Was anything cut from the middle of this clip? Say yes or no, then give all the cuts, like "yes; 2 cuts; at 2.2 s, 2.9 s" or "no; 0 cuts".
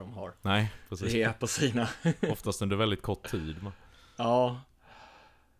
no; 0 cuts